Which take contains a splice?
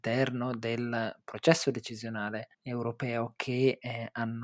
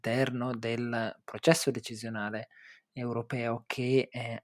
first; 1 cut; at 2.5 s

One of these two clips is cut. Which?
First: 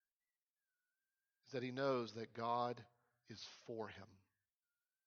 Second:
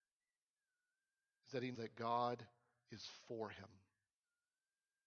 second; 1 cut; at 1.7 s

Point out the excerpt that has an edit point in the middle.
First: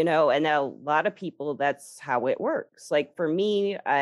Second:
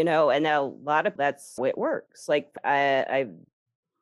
second; 3 cuts; at 1.2 s, 1.6 s, 2.6 s

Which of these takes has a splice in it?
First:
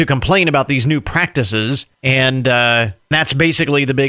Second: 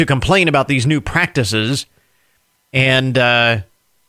first; 2 cuts; at 1.9 s, 3.1 s

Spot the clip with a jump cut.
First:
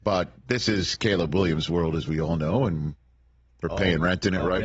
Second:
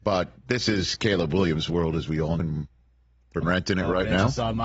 second; 2 cuts; at 2.4 s, 3.4 s

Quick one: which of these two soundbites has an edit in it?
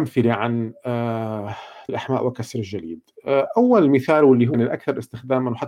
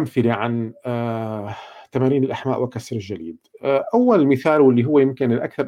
first; 2 cuts; at 1.9 s, 4.5 s

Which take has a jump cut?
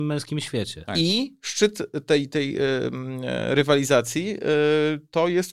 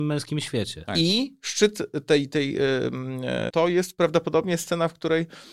second; 1 cut; at 3.5 s

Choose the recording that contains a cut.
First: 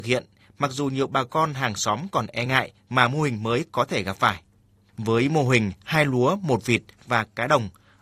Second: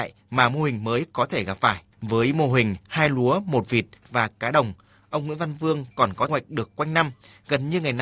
second; 2 cuts; at 1.9 s, 6.3 s

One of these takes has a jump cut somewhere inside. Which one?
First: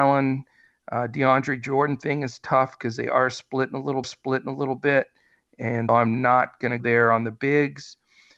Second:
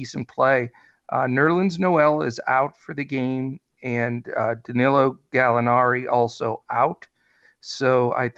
first; 3 cuts; at 4.0 s, 5.9 s, 6.8 s

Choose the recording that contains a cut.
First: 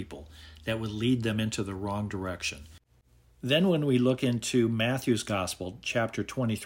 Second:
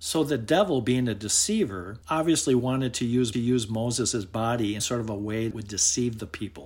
second; 4 cuts; at 2.0 s, 3.3 s, 4.8 s, 5.5 s

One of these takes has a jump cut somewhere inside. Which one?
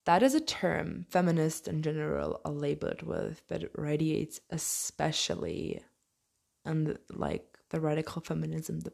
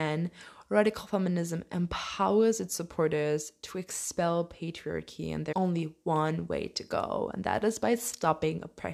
second; 1 cut; at 5.5 s

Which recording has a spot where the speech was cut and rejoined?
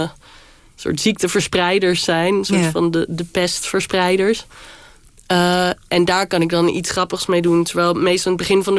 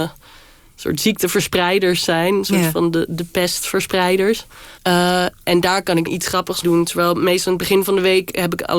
second; 3 cuts; at 4.8 s, 6.1 s, 6.6 s

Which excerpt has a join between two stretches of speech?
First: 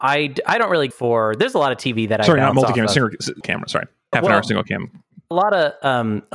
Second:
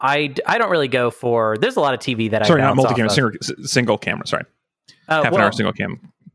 first; 4 cuts; at 0.9 s, 3.4 s, 4.1 s, 5.3 s

